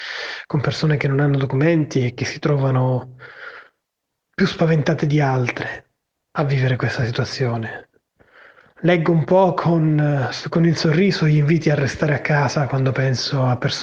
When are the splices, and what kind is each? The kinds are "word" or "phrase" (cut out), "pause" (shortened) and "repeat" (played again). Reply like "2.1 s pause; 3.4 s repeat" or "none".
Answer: none